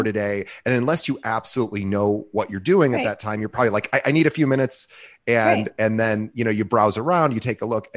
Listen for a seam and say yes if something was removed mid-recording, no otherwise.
no